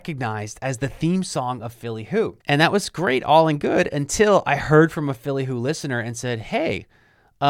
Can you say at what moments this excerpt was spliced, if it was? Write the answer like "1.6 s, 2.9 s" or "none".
2.4 s